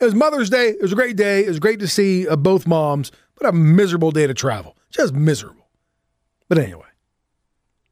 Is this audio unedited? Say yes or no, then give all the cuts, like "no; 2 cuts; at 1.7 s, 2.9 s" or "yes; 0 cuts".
yes; 0 cuts